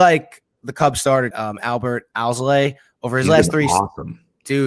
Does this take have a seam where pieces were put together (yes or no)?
yes